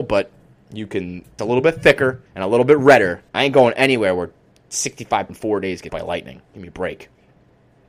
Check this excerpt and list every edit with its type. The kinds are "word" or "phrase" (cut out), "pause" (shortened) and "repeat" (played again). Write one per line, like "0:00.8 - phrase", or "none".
0:01.4 - phrase
0:02.3 - pause
0:03.3 - pause
0:05.3 - word
0:05.9 - word